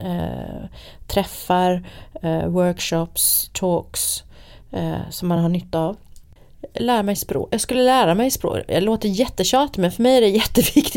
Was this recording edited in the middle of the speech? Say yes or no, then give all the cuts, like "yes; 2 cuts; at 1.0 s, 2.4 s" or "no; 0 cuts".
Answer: no; 0 cuts